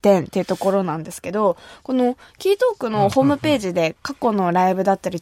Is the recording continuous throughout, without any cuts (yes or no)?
yes